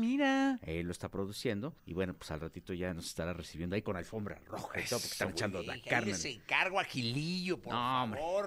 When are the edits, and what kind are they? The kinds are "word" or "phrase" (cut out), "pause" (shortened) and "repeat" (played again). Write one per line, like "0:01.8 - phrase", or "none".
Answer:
0:01.8 - pause